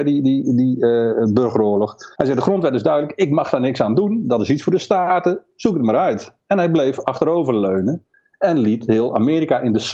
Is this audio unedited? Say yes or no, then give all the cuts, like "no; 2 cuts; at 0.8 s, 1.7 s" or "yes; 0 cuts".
no; 1 cut; at 2.1 s